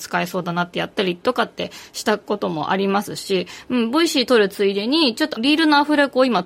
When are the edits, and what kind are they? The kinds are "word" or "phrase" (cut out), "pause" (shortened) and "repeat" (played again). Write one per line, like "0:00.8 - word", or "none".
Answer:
0:05.4 - word